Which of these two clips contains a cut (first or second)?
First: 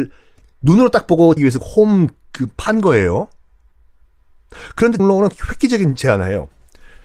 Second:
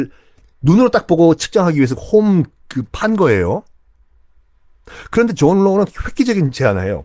first